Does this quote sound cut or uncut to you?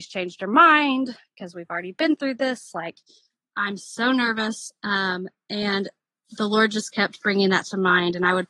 uncut